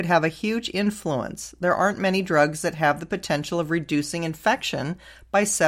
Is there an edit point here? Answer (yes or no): no